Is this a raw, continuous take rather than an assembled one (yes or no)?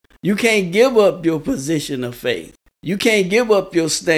no